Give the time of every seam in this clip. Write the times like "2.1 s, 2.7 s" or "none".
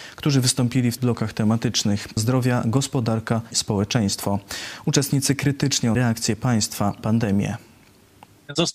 1.0 s, 2.2 s, 3.5 s, 5.9 s, 7.0 s